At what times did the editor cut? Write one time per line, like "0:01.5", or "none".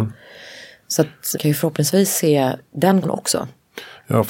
0:01.3
0:03.0